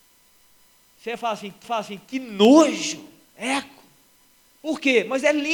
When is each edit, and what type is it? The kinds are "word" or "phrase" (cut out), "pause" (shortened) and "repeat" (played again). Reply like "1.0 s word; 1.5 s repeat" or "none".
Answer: 1.6 s repeat